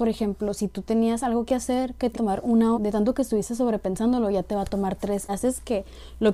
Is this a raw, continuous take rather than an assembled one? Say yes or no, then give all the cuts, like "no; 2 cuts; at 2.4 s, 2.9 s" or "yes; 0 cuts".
no; 3 cuts; at 2.1 s, 2.7 s, 5.3 s